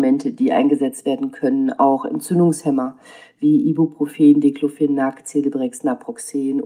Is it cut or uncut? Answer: uncut